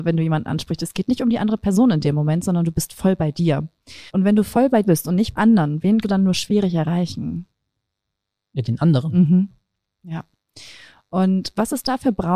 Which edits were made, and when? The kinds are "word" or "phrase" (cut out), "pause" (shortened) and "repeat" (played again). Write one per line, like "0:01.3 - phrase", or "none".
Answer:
0:04.1 - pause
0:04.8 - word
0:05.4 - word
0:06.0 - word